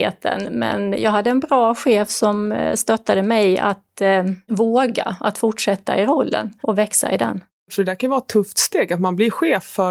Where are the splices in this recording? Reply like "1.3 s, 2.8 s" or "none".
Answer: none